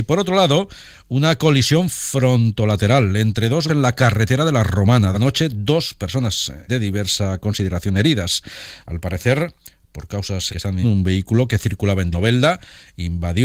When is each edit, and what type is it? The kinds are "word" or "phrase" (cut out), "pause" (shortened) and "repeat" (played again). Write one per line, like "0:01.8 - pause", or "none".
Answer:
0:03.7 - word
0:05.1 - word
0:06.7 - word
0:10.5 - word
0:10.8 - word
0:12.1 - word